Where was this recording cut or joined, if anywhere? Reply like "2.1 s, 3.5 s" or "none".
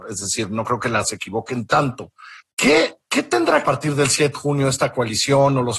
1.0 s, 2.4 s, 3.6 s, 4.3 s